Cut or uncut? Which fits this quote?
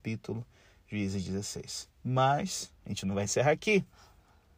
uncut